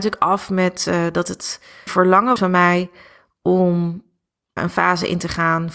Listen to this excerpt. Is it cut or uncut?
cut